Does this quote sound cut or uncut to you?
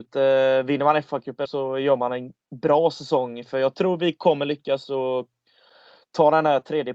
cut